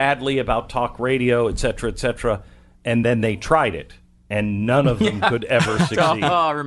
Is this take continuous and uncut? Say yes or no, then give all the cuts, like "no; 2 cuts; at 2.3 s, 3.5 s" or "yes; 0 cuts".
yes; 0 cuts